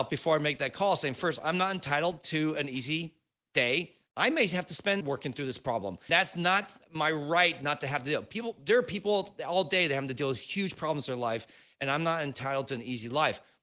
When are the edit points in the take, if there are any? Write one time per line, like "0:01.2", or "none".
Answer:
0:05.0
0:06.1